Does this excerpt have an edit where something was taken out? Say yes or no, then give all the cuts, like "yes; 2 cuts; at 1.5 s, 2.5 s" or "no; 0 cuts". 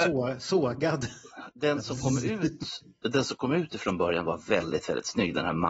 no; 0 cuts